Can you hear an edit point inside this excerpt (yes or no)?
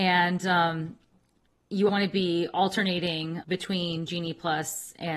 yes